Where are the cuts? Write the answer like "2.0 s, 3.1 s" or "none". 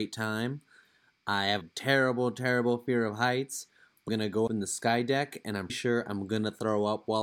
1.6 s, 4.1 s, 4.5 s, 5.7 s